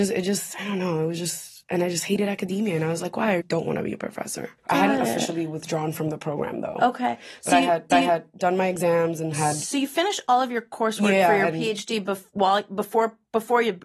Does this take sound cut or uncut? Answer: cut